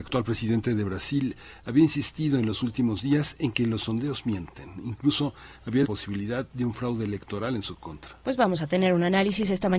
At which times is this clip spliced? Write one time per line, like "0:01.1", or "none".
0:05.8